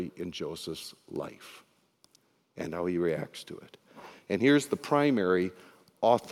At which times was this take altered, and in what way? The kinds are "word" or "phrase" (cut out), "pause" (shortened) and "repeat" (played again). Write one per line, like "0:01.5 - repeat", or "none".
none